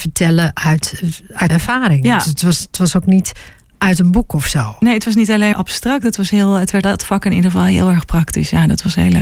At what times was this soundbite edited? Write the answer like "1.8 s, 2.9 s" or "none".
1.5 s, 5.5 s, 6.8 s